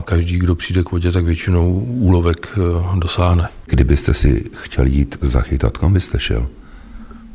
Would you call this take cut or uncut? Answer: uncut